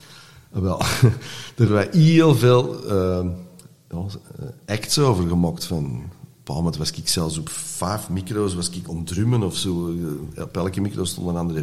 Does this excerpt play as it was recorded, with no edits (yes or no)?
no